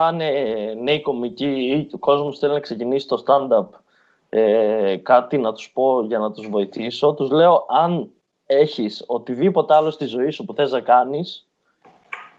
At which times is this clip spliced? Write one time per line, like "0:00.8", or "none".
none